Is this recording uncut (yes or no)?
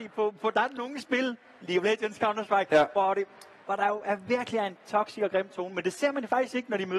yes